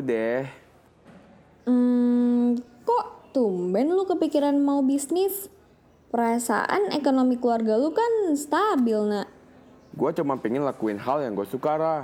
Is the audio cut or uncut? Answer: uncut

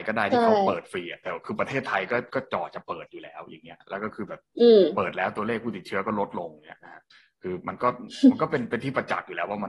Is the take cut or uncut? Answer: uncut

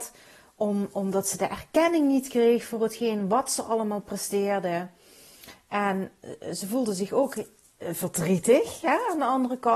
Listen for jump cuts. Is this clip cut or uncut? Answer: uncut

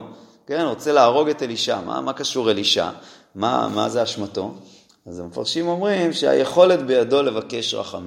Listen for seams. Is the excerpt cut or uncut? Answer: uncut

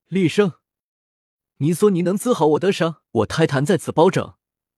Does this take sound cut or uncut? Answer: cut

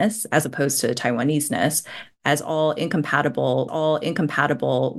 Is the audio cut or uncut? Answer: cut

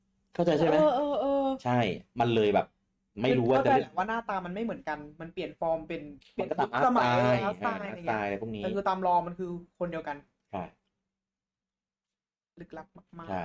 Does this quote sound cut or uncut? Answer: uncut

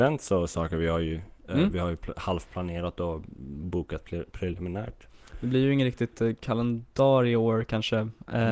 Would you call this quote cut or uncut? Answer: uncut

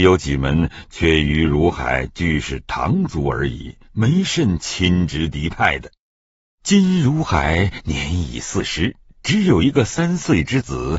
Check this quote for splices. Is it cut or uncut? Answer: uncut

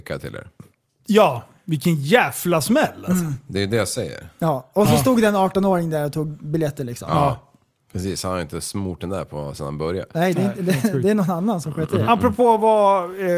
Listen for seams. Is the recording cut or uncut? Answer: uncut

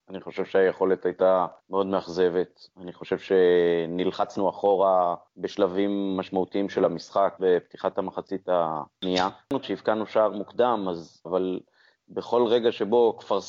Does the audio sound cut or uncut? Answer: cut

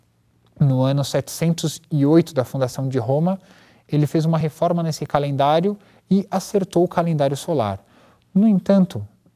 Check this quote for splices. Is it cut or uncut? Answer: uncut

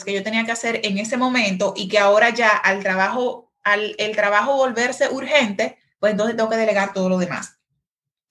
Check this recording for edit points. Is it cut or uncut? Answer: uncut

